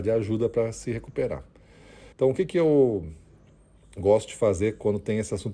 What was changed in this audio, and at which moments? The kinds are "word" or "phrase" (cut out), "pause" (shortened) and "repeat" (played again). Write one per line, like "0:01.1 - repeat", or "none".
0:02.1 - pause